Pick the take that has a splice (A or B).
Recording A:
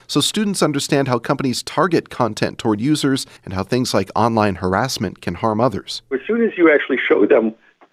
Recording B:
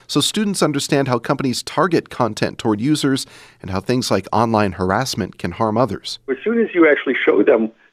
A